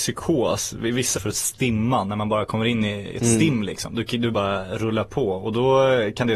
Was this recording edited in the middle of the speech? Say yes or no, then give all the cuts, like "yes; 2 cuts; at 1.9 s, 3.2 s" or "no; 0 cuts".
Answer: yes; 2 cuts; at 1.1 s, 4.3 s